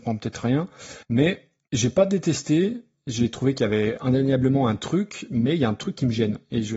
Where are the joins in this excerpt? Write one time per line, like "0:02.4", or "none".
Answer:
0:01.0